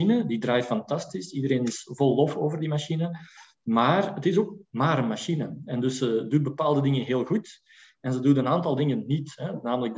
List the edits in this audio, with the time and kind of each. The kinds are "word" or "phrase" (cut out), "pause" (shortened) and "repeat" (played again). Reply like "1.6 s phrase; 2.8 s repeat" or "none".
none

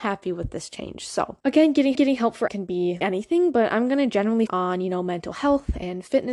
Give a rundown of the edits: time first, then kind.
1.4 s pause; 1.9 s repeat; 2.5 s word; 3.0 s word; 4.5 s word

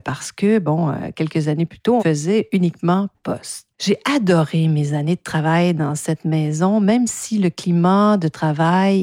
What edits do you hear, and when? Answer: 2.0 s phrase; 3.1 s phrase; 3.7 s pause

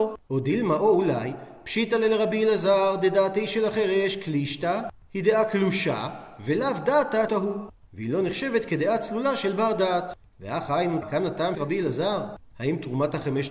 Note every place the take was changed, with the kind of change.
7.3 s word; 11.0 s word; 11.5 s word

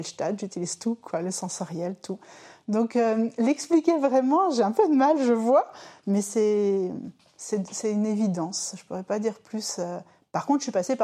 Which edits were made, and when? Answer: none

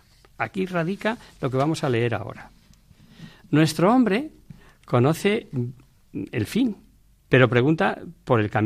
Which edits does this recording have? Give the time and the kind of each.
none

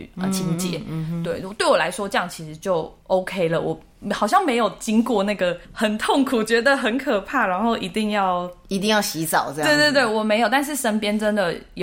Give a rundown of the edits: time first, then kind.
3.0 s pause; 5.6 s pause

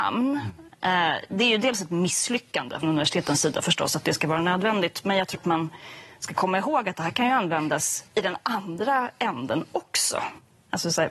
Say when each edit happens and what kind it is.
2.8 s word; 5.3 s word; 8.1 s pause

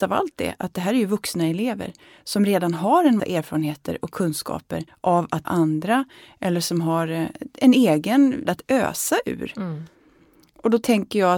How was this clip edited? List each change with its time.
3.2 s word; 4.9 s pause; 5.4 s word; 8.4 s phrase

